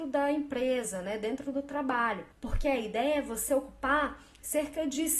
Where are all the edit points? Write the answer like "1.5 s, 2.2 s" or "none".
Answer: 2.3 s